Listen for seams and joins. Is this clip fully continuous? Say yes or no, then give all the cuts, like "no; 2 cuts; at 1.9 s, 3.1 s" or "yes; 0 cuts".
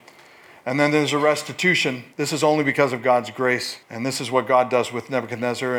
no; 2 cuts; at 2.1 s, 3.8 s